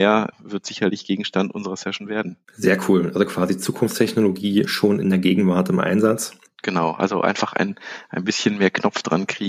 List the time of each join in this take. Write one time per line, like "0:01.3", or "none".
0:02.4